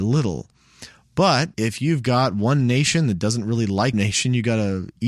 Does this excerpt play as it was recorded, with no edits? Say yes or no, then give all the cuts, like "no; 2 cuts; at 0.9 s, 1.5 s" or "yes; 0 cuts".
no; 2 cuts; at 1.5 s, 3.9 s